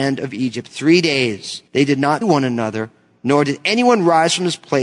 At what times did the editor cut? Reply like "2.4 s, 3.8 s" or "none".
1.7 s, 2.2 s